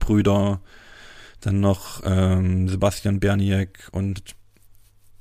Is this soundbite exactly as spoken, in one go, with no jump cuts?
yes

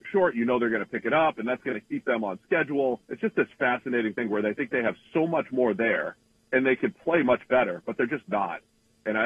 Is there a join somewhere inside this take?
yes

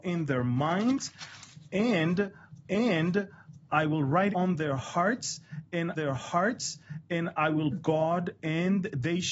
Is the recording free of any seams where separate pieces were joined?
no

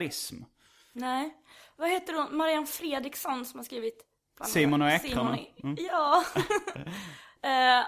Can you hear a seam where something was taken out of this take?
no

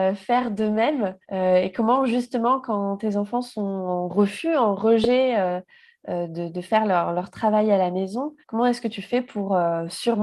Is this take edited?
yes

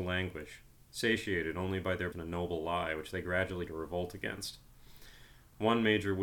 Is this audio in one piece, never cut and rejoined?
no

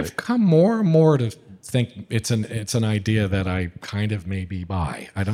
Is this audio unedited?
yes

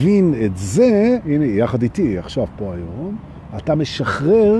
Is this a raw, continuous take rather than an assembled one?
yes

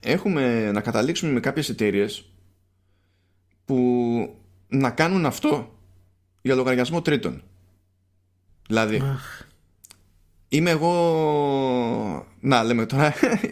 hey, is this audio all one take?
yes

